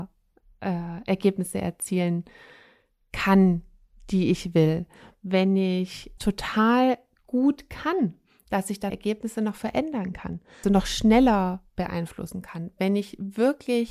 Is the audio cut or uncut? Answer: cut